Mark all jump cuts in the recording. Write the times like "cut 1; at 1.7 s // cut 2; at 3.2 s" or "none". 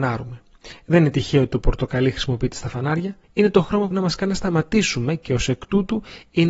cut 1; at 3.2 s // cut 2; at 3.9 s

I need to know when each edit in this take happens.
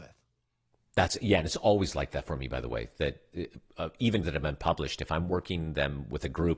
cut 1; at 4.2 s

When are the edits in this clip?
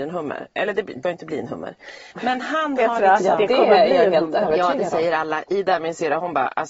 cut 1; at 1.0 s // cut 2; at 2.1 s

